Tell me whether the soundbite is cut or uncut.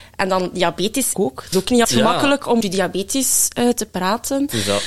cut